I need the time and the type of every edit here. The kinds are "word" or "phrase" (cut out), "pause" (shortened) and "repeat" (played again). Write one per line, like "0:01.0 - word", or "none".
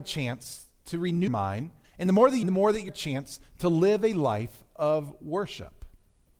0:01.3 - word
0:01.8 - pause
0:02.4 - phrase
0:02.9 - phrase